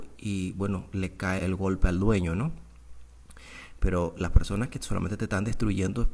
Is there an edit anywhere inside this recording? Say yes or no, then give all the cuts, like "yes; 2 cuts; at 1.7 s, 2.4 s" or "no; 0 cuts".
yes; 1 cut; at 1.4 s